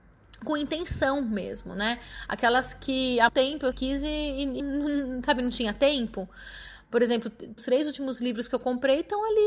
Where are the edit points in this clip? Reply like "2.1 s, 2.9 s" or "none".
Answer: 3.3 s, 3.7 s, 4.6 s, 7.6 s